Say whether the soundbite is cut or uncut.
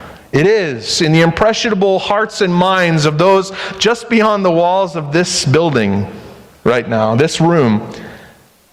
uncut